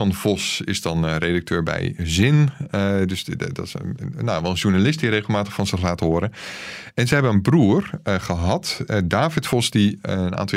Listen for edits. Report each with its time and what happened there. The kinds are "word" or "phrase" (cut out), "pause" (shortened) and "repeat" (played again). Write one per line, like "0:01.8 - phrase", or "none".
none